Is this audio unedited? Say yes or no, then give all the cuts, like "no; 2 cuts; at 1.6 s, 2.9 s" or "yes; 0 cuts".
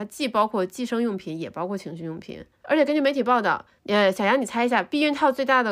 yes; 0 cuts